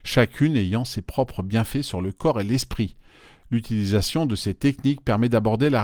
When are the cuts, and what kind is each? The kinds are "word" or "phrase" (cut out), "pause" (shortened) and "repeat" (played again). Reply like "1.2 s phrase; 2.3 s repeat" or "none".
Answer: none